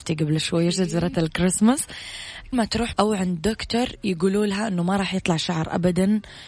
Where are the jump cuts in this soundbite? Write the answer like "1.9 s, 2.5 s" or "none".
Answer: 2.5 s, 2.9 s